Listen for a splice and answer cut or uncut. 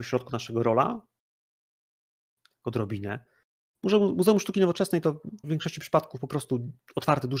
cut